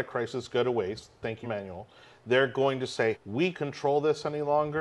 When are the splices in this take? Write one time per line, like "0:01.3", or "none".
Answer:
0:01.4
0:03.1
0:03.5